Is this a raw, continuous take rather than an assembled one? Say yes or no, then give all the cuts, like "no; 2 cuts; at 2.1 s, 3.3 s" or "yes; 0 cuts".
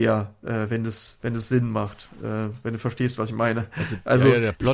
yes; 0 cuts